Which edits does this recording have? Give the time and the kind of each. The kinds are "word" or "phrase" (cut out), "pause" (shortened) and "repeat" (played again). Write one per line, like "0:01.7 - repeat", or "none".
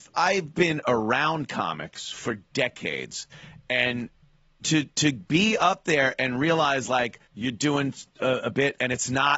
0:07.3 - pause